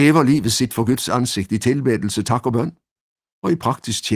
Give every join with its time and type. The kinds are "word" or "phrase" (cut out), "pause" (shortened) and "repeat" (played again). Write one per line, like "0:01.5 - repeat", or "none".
none

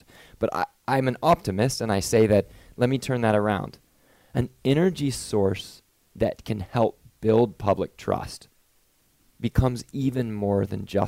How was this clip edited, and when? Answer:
none

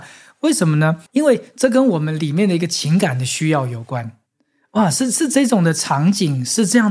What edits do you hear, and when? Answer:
0:01.1 - pause

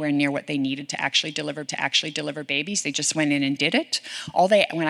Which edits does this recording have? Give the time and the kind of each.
0:01.7 - repeat

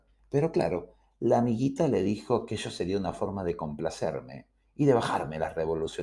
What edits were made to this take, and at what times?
none

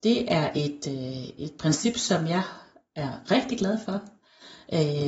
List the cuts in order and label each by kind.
none

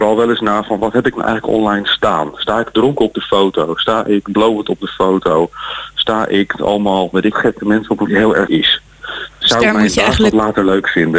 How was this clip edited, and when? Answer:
0:06.6 - word
0:07.3 - phrase
0:08.1 - phrase
0:08.5 - word

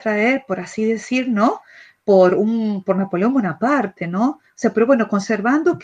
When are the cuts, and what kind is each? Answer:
none

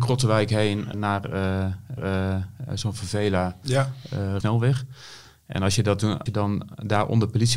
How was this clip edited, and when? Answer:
0:00.9 - word
0:02.0 - repeat
0:04.4 - phrase
0:06.3 - word

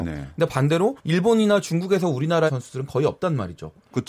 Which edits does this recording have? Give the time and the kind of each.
0:01.0 - pause
0:02.5 - word

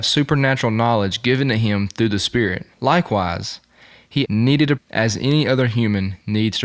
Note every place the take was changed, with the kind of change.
0:02.7 - pause
0:04.2 - word
0:04.8 - word

